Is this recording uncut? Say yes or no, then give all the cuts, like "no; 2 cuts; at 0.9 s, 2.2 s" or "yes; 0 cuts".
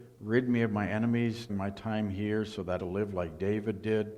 no; 2 cuts; at 1.5 s, 2.8 s